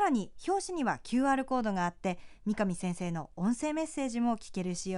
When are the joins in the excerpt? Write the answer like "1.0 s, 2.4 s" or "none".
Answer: none